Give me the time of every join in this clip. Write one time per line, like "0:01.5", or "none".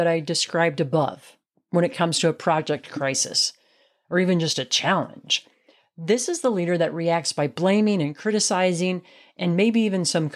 none